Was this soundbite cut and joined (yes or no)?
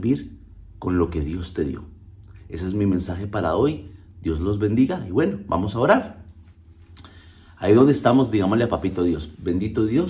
no